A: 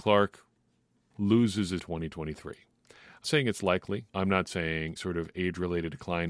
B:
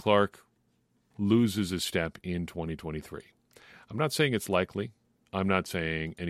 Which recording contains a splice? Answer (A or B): A